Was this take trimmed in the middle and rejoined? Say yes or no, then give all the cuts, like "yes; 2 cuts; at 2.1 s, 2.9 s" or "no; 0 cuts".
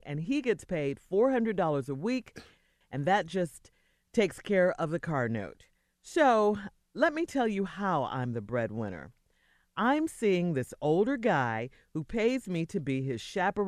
no; 0 cuts